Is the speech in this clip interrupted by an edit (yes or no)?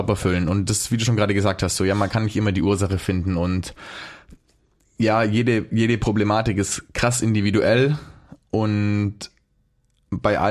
no